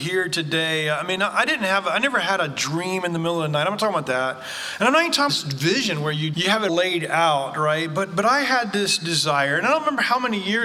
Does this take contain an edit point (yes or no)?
yes